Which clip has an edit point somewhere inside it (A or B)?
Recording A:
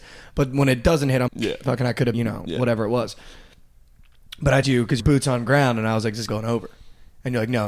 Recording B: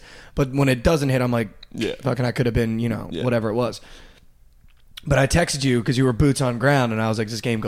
A